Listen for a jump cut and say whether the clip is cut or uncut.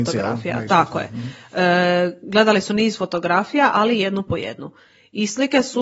uncut